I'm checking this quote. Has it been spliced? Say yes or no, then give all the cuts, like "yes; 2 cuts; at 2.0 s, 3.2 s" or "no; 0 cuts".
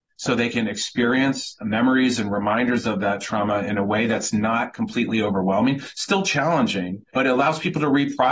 yes; 1 cut; at 7.1 s